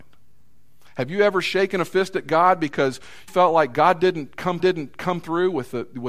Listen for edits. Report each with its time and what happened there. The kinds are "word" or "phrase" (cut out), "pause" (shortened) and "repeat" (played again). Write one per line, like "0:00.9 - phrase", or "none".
0:03.3 - word
0:04.6 - repeat